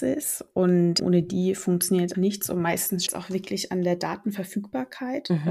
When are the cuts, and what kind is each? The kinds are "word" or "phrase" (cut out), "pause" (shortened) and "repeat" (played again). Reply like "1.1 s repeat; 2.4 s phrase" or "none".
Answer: 1.0 s word; 2.1 s word; 3.1 s word